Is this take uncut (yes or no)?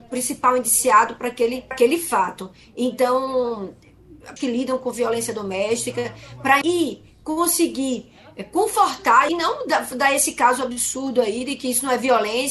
no